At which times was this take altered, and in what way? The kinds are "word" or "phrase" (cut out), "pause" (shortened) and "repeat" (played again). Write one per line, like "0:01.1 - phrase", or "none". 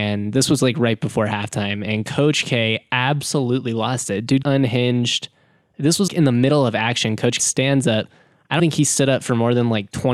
0:04.4 - phrase
0:06.1 - word
0:07.4 - word
0:08.6 - word